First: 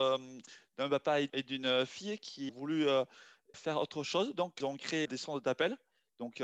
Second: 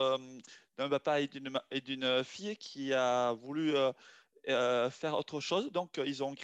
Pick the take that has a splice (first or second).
first